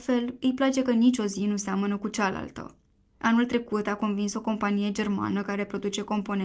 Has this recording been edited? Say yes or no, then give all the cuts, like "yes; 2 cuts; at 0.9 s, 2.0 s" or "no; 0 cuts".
no; 0 cuts